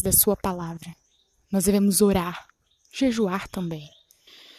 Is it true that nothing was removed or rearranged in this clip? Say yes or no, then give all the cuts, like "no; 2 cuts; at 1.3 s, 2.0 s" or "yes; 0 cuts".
yes; 0 cuts